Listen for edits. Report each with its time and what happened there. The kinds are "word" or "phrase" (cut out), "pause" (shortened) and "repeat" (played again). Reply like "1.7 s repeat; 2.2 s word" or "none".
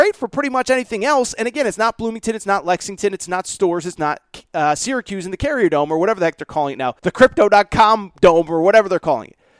7.0 s pause